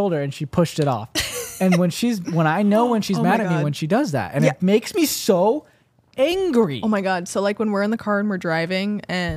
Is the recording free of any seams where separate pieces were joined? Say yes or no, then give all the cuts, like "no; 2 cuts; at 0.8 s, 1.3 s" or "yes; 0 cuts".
yes; 0 cuts